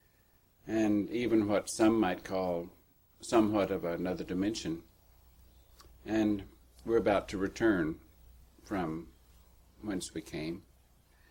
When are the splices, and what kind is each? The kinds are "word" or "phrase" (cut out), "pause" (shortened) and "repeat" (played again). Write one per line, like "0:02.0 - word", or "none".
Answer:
none